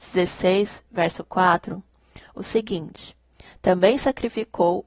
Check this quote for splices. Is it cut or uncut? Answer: uncut